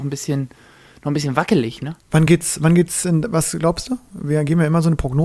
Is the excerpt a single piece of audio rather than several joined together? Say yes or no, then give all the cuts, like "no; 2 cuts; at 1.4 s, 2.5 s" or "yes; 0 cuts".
yes; 0 cuts